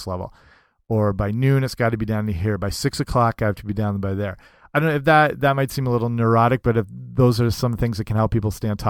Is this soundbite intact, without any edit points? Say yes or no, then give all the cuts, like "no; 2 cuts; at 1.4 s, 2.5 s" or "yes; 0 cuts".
yes; 0 cuts